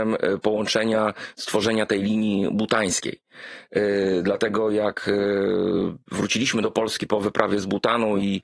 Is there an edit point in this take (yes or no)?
no